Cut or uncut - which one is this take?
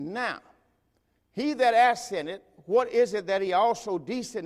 uncut